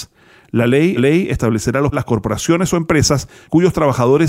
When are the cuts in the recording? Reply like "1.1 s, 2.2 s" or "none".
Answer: 1.0 s, 1.9 s